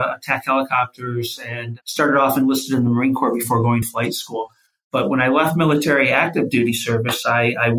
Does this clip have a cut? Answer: yes; 1 cut; at 3.8 s

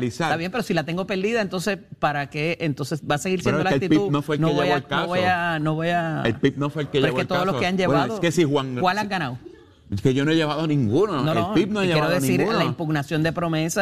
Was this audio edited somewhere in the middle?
no; 0 cuts

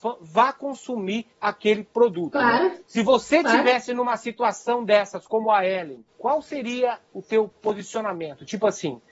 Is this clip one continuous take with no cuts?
no; 3 cuts; at 1.3 s, 2.9 s, 6.1 s

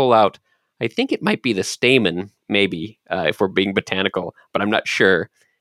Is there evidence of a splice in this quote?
yes; 1 cut; at 2.4 s

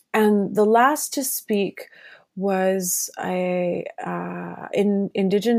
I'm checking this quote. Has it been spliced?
no; 0 cuts

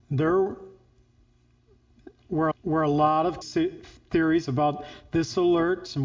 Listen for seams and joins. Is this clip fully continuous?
no; 2 cuts; at 2.5 s, 3.4 s

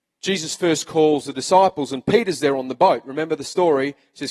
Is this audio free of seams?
yes; 0 cuts

